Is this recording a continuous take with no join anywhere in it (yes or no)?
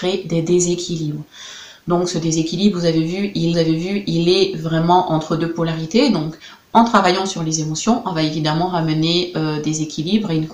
no